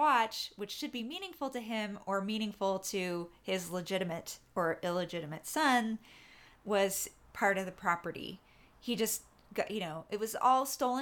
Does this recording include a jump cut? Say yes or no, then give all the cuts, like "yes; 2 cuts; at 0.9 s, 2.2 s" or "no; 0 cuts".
no; 0 cuts